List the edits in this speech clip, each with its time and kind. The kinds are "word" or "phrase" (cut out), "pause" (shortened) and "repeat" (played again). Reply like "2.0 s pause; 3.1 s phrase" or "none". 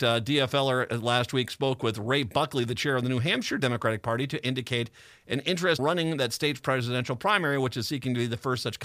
5.8 s word